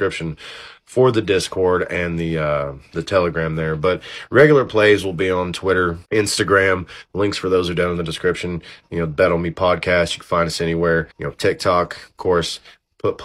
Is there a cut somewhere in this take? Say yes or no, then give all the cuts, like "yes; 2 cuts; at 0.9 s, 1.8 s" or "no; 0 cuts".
yes; 2 cuts; at 6.0 s, 11.1 s